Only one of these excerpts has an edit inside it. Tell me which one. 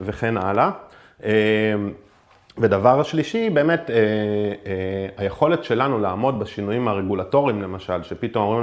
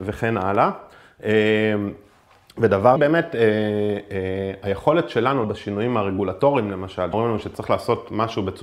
second; 3 cuts; at 3.0 s, 5.4 s, 7.1 s

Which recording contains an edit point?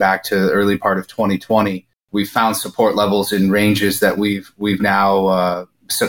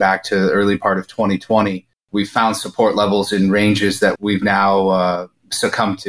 second; 1 cut; at 4.2 s

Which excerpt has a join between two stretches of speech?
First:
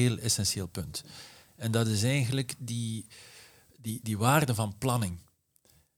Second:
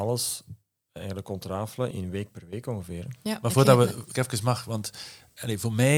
second; 2 cuts; at 1.9 s, 4.1 s

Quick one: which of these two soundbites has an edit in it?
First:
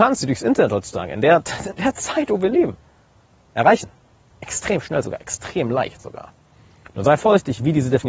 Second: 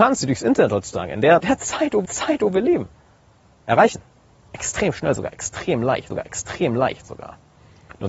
second; 3 cuts; at 1.4 s, 2.1 s, 6.1 s

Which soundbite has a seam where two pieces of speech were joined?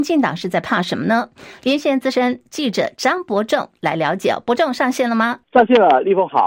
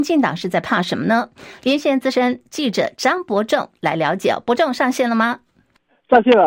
first; 1 cut; at 5.4 s

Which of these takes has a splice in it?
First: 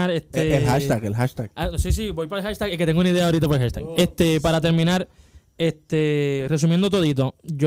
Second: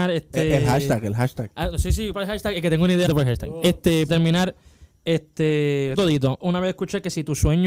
second; 5 cuts; at 2.1 s, 3.1 s, 4.1 s, 6.0 s, 6.4 s

